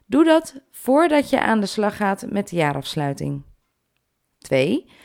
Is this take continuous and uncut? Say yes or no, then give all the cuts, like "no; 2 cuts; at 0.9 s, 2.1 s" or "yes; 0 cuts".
yes; 0 cuts